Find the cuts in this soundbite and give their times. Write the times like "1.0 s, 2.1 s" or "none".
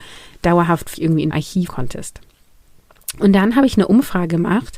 0.9 s, 1.3 s, 1.7 s